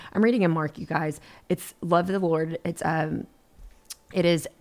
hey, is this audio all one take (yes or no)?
yes